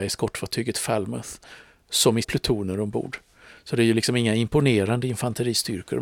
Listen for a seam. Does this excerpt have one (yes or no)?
yes